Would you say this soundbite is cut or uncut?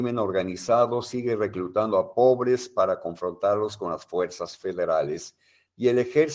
uncut